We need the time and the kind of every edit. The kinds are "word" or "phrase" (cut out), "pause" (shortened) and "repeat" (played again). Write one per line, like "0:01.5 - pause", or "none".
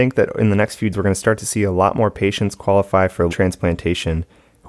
0:00.9 - word
0:03.3 - word